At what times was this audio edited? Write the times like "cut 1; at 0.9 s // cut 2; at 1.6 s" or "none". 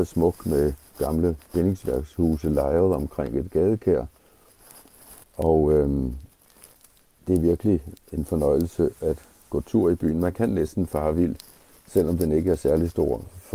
cut 1; at 5.2 s